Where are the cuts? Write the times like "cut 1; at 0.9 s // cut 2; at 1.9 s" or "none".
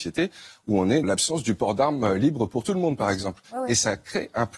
cut 1; at 1.0 s